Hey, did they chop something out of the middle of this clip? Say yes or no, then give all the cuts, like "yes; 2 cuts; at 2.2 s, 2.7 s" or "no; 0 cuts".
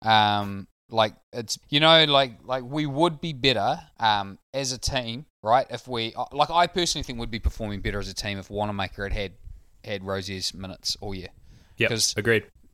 yes; 3 cuts; at 1.6 s, 3.9 s, 5.3 s